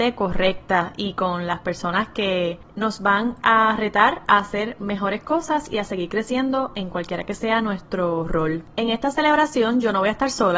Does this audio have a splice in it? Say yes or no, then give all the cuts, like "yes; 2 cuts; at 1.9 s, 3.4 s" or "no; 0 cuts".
no; 0 cuts